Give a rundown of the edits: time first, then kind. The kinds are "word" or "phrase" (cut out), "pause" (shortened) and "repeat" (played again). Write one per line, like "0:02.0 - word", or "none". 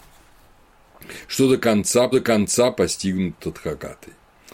0:02.1 - repeat